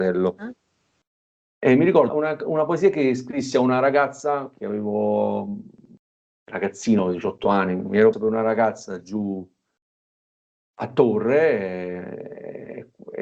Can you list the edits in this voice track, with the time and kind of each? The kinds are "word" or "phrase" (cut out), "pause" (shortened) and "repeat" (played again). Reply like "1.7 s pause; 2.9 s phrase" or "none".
2.1 s word; 8.1 s word